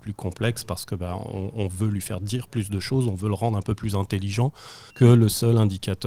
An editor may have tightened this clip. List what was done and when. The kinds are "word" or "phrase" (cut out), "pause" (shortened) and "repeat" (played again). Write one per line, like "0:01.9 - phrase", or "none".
0:04.9 - pause